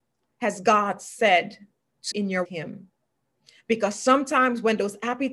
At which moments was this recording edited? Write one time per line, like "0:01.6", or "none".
0:02.1
0:02.4